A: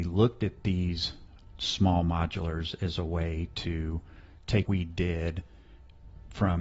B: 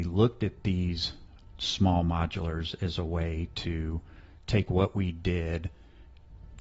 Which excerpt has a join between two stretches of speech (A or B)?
A